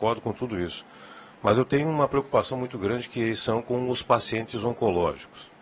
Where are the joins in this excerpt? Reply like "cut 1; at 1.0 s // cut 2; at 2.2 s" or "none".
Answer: none